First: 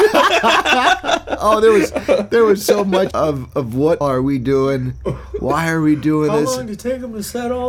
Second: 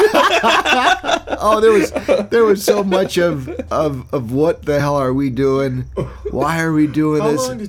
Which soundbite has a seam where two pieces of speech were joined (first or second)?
first